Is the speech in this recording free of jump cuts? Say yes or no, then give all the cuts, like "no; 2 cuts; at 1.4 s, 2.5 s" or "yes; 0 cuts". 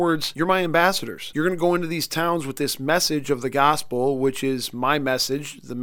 yes; 0 cuts